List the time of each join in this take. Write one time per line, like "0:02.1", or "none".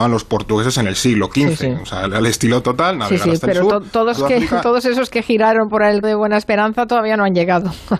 0:02.6
0:04.2
0:06.0